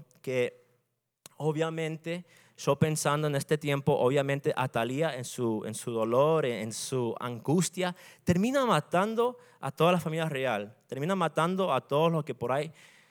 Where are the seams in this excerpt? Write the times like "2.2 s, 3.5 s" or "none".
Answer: none